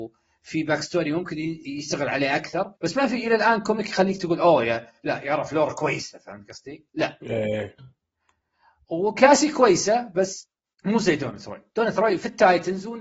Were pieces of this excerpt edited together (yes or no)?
yes